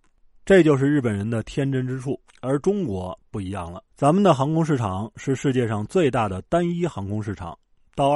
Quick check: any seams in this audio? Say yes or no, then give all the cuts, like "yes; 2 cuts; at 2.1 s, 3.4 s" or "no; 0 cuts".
yes; 2 cuts; at 2.3 s, 3.9 s